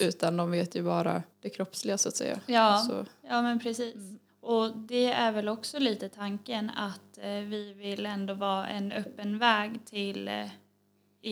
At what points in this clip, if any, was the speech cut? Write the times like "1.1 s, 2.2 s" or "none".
1.3 s, 4.3 s